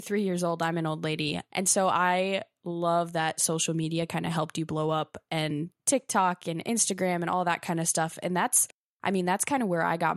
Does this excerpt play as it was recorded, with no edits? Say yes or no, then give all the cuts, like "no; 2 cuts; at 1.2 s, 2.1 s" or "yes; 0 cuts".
yes; 0 cuts